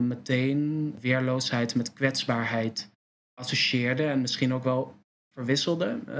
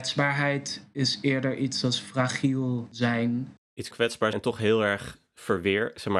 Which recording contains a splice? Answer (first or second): second